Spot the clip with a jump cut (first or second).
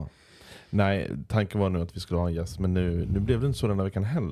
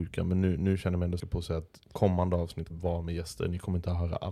second